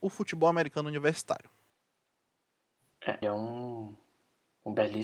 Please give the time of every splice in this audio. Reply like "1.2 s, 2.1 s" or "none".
3.2 s